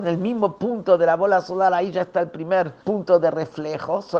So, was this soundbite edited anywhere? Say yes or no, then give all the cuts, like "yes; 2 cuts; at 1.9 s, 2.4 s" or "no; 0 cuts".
yes; 1 cut; at 2.8 s